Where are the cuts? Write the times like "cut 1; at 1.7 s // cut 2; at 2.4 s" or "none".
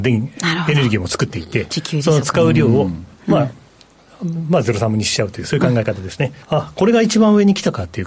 cut 1; at 6.4 s